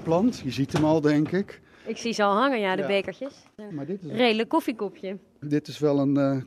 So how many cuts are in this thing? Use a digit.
1